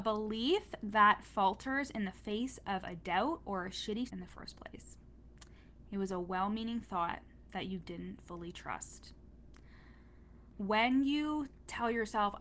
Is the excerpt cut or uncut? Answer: cut